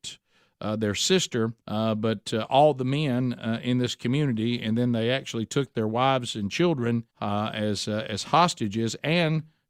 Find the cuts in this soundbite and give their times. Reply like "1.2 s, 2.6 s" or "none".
1.6 s, 7.1 s